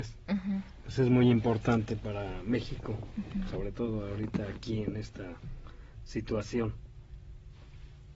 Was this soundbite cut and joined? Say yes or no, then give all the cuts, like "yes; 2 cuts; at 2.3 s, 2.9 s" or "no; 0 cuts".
no; 0 cuts